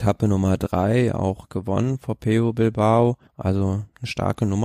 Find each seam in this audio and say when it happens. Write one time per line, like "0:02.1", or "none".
0:03.3